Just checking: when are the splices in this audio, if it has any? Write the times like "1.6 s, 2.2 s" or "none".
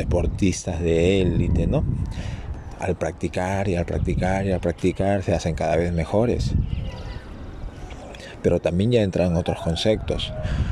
none